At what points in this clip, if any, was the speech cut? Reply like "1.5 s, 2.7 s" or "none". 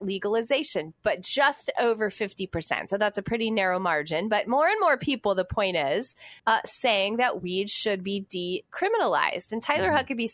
6.4 s

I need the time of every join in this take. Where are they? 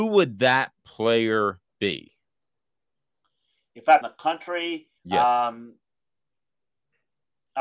1.7 s, 4.0 s, 5.0 s

